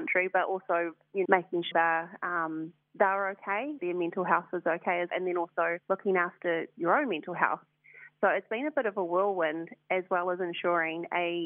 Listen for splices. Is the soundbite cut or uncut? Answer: cut